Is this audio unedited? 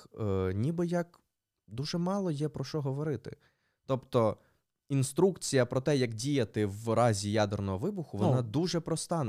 yes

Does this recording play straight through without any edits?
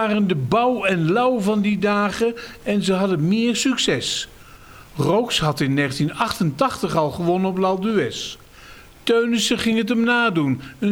yes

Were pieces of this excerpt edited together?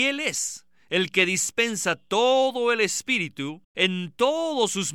yes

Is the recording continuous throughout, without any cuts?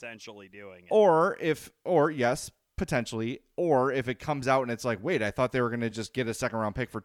yes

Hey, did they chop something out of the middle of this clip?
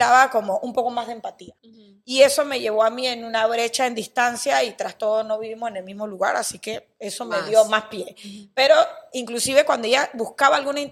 yes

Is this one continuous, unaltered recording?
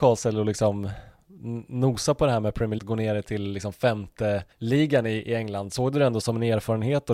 no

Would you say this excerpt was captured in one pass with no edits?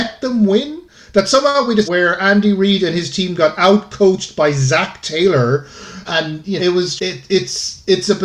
no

